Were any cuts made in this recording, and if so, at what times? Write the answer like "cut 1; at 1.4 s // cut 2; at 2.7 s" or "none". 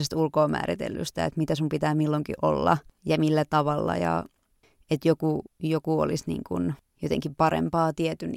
none